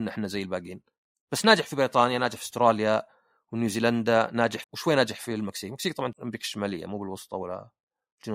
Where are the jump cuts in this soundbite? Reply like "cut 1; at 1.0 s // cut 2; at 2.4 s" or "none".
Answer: cut 1; at 4.6 s // cut 2; at 6.1 s